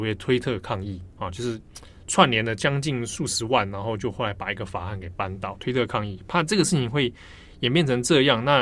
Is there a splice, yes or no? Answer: yes